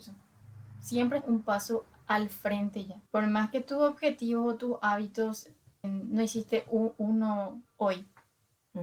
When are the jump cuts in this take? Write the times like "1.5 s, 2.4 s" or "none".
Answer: 1.2 s, 3.1 s, 5.8 s